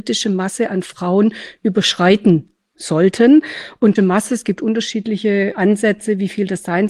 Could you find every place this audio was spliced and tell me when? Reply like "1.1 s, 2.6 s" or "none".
2.7 s, 4.0 s, 5.5 s